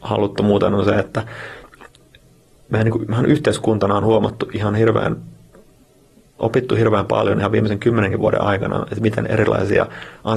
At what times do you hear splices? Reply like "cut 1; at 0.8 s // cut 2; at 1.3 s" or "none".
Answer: none